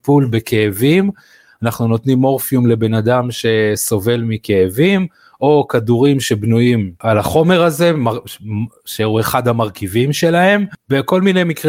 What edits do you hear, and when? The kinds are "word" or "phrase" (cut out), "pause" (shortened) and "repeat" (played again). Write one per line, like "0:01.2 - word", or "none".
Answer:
none